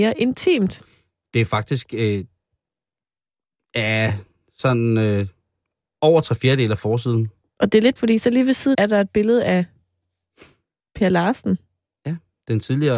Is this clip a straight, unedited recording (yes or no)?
no